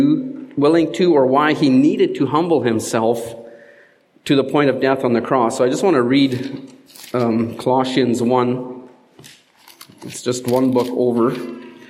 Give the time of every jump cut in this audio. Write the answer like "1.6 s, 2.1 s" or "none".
none

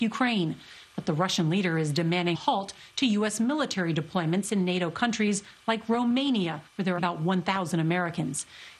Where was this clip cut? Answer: 2.3 s, 6.7 s, 7.0 s

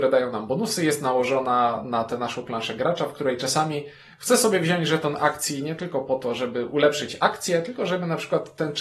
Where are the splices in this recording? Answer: none

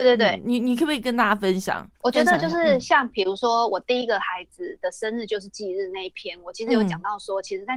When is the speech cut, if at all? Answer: 1.9 s

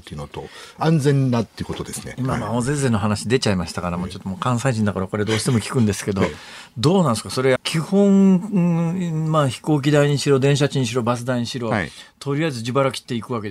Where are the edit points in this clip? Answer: 7.6 s

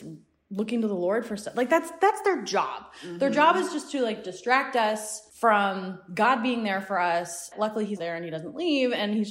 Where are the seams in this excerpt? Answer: 5.3 s, 7.5 s, 8.0 s

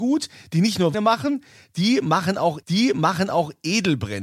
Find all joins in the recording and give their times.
0.9 s, 2.6 s

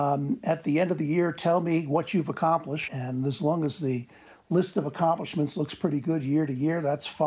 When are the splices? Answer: 2.9 s

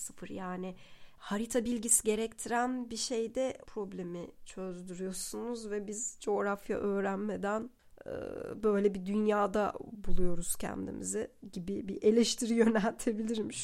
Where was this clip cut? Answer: 3.7 s

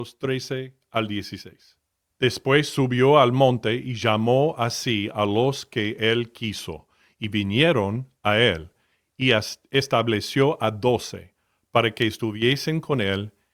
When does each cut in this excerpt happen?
none

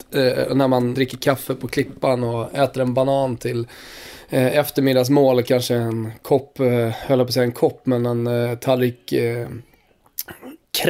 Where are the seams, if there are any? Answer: 0.9 s

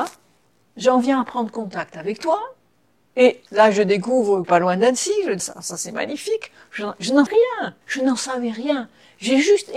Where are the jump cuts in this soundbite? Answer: 3.5 s, 4.4 s, 5.4 s, 7.3 s, 7.8 s

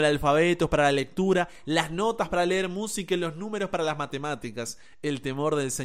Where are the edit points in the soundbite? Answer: none

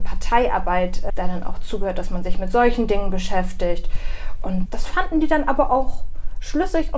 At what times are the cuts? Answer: 1.1 s, 4.7 s

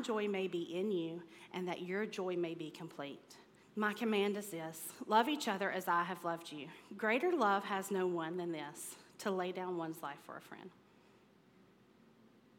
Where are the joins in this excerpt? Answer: 3.6 s

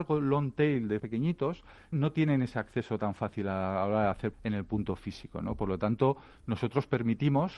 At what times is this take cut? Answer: 1.0 s, 1.9 s, 4.3 s

